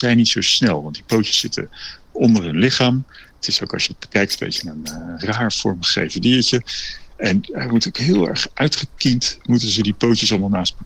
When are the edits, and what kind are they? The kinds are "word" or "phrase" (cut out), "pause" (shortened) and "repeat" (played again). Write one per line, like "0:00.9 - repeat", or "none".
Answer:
none